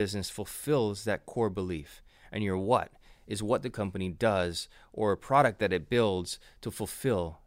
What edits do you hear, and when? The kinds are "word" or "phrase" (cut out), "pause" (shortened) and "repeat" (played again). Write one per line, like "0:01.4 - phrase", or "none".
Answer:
none